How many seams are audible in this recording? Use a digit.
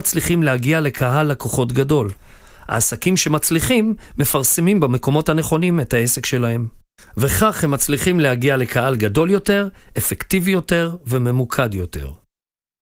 0